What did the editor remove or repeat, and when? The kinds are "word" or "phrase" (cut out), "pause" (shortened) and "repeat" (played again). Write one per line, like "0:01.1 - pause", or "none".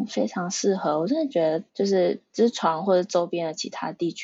0:01.7 - pause